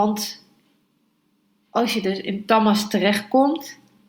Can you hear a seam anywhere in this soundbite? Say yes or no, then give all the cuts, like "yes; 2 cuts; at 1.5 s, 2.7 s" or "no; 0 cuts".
no; 0 cuts